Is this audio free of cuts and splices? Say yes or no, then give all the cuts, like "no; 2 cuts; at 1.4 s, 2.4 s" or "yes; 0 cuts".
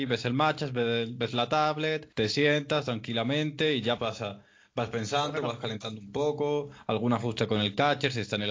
no; 2 cuts; at 2.1 s, 4.0 s